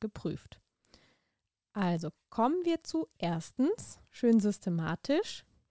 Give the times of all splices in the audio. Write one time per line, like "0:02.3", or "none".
none